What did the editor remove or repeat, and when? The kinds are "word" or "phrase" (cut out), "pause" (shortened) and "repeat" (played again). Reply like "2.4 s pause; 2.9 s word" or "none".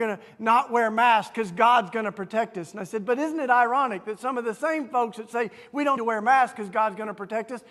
6.0 s word